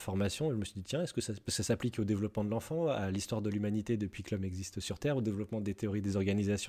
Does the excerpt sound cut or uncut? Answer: uncut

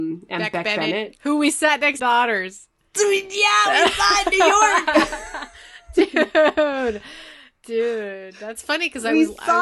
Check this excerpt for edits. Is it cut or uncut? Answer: cut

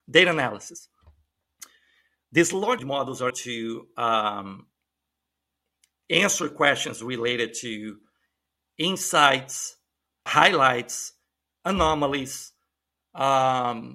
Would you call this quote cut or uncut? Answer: cut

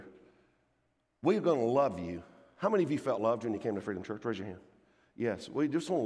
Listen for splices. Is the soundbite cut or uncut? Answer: uncut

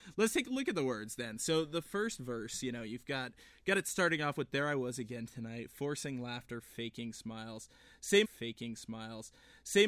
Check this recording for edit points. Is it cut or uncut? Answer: cut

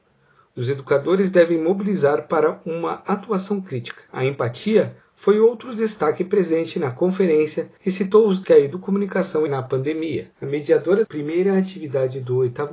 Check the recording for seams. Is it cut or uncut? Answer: cut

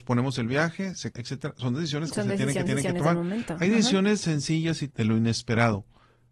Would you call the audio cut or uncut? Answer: cut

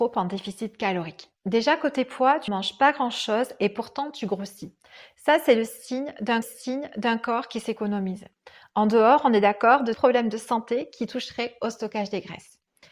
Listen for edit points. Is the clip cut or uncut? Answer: cut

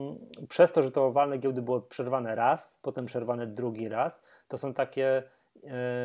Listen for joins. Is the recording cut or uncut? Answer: uncut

